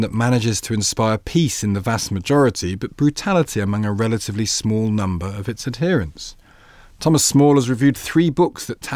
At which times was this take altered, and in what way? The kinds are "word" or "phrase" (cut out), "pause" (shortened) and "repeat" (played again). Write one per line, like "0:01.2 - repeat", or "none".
none